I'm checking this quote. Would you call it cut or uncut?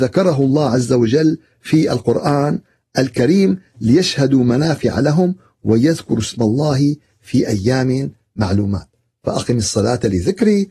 uncut